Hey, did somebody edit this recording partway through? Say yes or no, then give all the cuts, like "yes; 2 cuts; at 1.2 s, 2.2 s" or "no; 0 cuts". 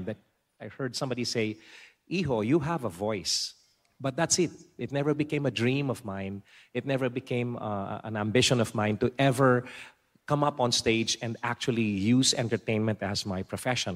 no; 0 cuts